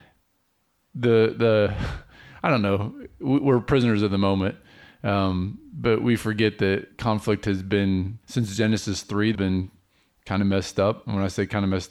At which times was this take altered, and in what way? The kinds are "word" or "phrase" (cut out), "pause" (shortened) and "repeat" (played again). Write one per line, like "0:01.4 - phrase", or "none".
0:08.2 - pause
0:09.3 - word